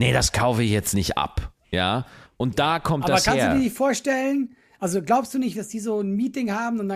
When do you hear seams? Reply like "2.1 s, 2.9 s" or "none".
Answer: 1.6 s, 5.5 s